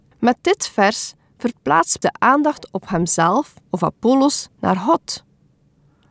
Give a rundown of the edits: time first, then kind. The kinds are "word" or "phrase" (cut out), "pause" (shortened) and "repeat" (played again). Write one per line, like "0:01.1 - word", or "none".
0:02.0 - word
0:03.6 - pause